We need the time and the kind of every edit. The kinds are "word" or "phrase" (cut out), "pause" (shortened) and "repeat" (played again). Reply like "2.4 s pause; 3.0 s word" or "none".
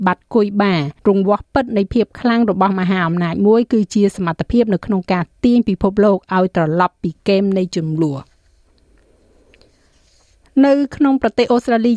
1.0 s pause